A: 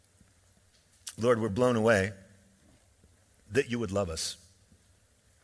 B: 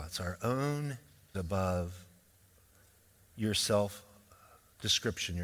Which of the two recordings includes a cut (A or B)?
B